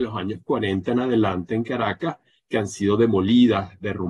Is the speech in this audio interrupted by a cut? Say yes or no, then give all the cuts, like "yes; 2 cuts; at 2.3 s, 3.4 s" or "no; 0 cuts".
no; 0 cuts